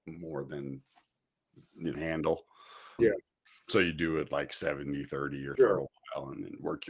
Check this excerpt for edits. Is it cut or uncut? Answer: cut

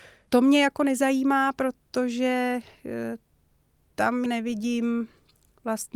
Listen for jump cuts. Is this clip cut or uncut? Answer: cut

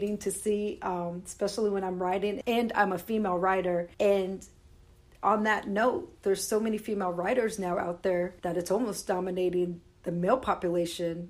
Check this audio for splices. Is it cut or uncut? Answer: cut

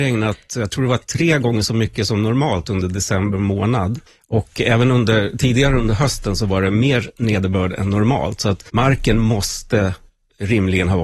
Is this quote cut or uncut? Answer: cut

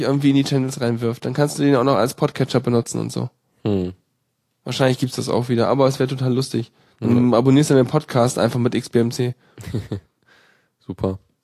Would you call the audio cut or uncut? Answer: uncut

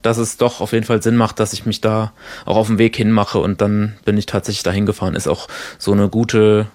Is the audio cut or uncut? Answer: uncut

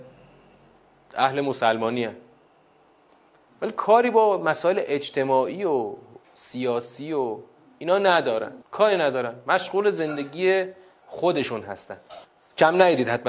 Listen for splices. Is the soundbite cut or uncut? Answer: cut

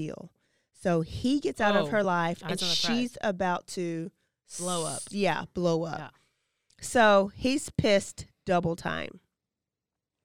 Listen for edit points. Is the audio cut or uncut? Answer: uncut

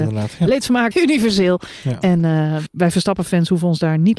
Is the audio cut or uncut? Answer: cut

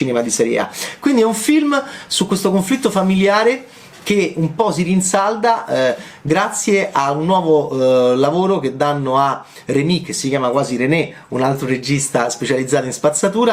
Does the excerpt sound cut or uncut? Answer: uncut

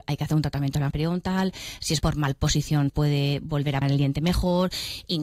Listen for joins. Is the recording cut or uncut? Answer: cut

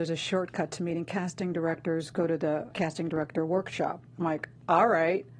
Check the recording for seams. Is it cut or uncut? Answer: cut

